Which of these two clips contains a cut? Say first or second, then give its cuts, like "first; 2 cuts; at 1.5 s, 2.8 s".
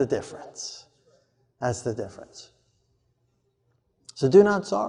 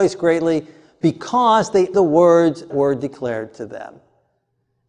second; 2 cuts; at 1.9 s, 2.7 s